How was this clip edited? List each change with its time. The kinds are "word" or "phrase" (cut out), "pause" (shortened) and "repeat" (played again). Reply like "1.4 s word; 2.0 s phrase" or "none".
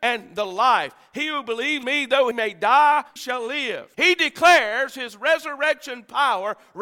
1.8 s word; 2.3 s word; 3.2 s word; 3.9 s pause